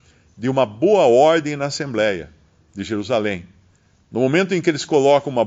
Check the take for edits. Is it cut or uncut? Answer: uncut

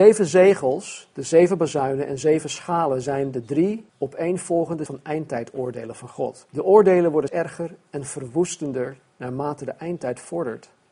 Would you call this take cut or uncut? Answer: cut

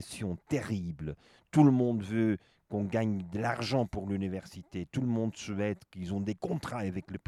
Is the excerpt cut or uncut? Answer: uncut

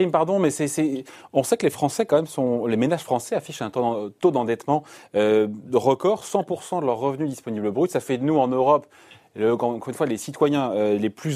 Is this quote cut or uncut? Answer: uncut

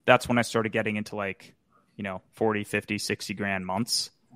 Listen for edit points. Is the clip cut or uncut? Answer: uncut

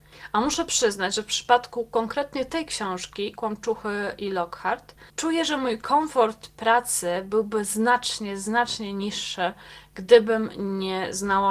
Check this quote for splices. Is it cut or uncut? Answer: cut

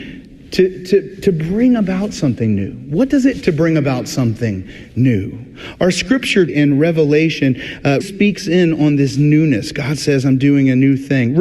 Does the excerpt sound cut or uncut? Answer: cut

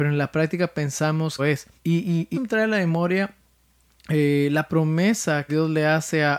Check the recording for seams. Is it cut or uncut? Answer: cut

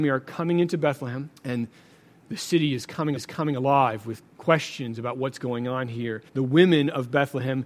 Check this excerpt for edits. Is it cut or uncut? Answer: cut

